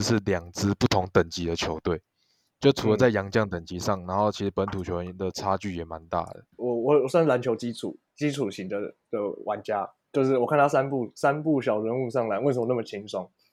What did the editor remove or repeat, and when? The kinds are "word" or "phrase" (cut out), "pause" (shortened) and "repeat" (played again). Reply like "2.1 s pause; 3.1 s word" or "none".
6.5 s pause